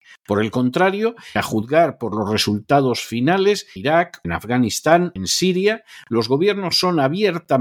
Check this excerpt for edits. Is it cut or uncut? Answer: cut